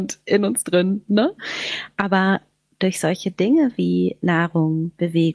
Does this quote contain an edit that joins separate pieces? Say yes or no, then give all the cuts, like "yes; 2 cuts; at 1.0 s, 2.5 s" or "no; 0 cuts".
no; 0 cuts